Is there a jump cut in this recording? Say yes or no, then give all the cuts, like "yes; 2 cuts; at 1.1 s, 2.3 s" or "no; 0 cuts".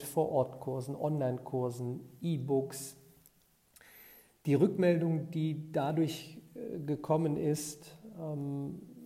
no; 0 cuts